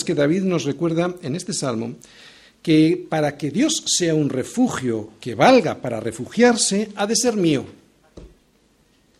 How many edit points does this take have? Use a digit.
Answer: 0